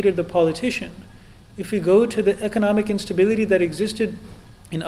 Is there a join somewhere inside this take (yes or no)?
no